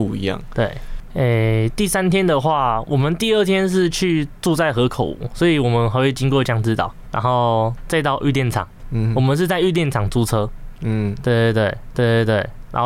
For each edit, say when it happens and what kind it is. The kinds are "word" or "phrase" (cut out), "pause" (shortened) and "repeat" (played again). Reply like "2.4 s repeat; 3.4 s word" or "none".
7.1 s word; 11.9 s repeat